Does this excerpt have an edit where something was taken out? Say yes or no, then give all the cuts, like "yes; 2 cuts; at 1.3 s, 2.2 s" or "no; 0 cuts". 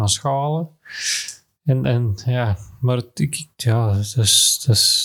no; 0 cuts